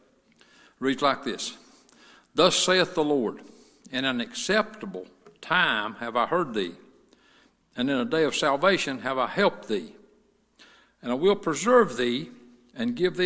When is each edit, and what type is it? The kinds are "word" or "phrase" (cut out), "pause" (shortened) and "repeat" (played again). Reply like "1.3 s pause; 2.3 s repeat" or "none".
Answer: none